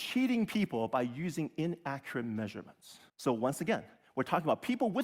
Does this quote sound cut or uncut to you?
cut